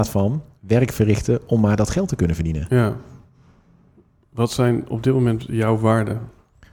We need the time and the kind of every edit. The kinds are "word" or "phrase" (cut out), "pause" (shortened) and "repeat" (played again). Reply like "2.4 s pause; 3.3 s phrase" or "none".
none